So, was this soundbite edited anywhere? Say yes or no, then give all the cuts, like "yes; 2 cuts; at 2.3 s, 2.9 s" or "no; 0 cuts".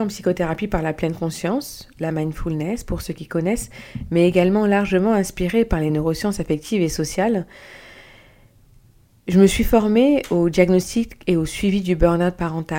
no; 0 cuts